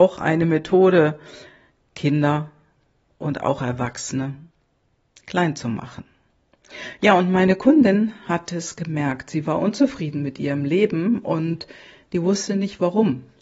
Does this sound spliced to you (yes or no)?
no